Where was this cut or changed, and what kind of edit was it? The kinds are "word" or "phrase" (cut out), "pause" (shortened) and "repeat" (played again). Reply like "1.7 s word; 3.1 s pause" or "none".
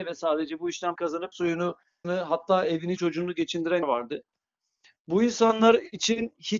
1.0 s word; 1.3 s word; 2.0 s word; 3.0 s word; 3.8 s word